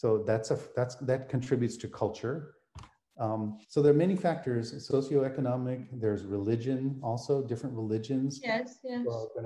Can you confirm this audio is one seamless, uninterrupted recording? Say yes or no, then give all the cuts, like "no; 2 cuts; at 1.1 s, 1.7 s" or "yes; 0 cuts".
no; 2 cuts; at 3.6 s, 4.9 s